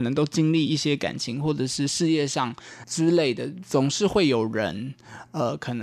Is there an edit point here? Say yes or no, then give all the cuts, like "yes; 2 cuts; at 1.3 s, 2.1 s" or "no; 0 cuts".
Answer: no; 0 cuts